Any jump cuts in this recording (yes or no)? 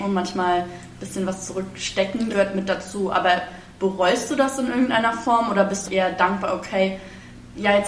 yes